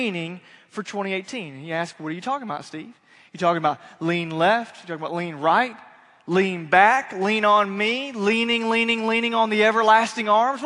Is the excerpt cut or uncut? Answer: uncut